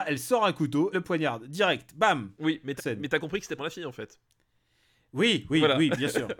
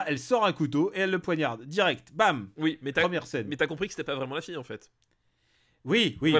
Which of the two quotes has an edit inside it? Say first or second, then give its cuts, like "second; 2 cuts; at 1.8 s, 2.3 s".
first; 3 cuts; at 0.9 s, 2.8 s, 3.6 s